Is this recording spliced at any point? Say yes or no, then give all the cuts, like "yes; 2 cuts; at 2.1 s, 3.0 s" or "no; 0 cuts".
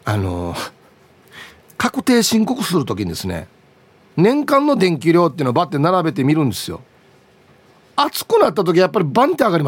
no; 0 cuts